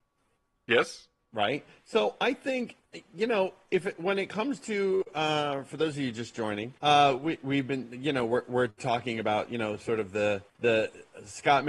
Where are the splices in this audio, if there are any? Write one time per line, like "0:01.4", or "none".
0:01.2
0:06.8
0:10.5